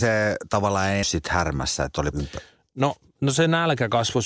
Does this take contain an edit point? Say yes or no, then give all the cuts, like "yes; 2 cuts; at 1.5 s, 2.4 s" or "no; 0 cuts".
yes; 2 cuts; at 1.0 s, 2.1 s